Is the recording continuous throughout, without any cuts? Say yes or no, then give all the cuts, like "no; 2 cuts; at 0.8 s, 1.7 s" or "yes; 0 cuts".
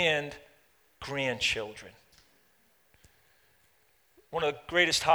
yes; 0 cuts